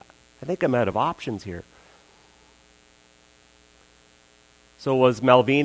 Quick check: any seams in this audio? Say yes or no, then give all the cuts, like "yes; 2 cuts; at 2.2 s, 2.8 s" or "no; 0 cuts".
no; 0 cuts